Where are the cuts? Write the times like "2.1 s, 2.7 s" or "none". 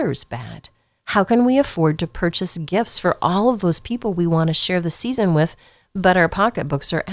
none